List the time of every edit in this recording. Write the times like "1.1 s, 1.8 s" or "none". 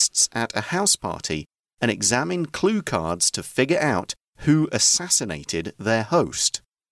none